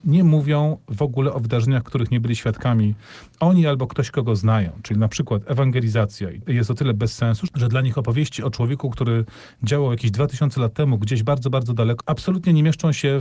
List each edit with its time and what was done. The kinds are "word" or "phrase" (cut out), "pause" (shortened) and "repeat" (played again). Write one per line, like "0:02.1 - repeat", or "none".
none